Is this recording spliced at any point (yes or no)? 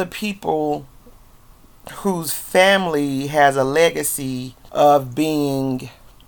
yes